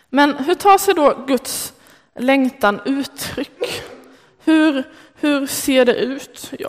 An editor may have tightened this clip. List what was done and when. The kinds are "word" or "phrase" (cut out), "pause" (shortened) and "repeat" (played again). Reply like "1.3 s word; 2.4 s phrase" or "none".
none